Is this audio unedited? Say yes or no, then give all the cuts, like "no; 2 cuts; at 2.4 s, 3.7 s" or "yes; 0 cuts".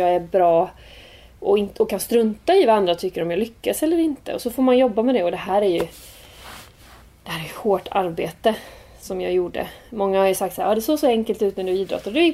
yes; 0 cuts